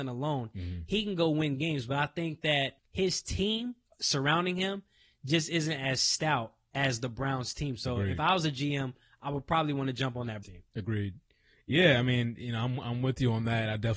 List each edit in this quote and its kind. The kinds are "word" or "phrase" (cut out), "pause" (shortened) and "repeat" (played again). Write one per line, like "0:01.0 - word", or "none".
0:10.4 - word